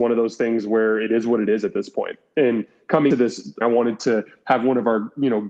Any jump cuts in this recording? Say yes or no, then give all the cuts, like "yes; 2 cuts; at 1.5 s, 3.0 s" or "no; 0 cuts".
yes; 2 cuts; at 3.1 s, 3.6 s